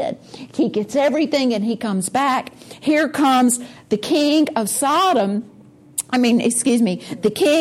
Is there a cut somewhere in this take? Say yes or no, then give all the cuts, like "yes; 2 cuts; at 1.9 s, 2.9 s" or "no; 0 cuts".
no; 0 cuts